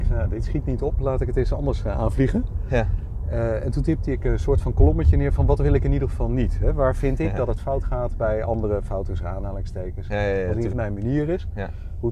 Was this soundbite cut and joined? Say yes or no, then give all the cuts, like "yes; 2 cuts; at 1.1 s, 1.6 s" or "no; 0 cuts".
yes; 1 cut; at 10.7 s